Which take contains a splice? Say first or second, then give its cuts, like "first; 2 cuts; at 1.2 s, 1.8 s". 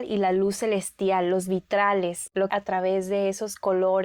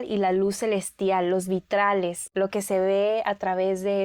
first; 1 cut; at 2.5 s